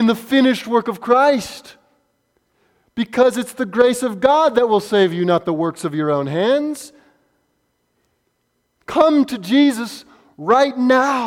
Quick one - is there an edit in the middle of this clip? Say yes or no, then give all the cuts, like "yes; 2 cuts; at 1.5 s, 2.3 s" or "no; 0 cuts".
no; 0 cuts